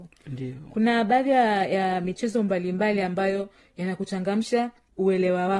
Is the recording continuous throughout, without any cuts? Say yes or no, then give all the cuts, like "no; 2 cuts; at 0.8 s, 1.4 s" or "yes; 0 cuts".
yes; 0 cuts